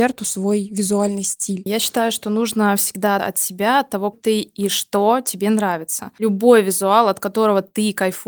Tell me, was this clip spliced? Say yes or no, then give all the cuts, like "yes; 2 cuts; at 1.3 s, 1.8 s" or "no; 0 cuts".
yes; 2 cuts; at 3.2 s, 4.1 s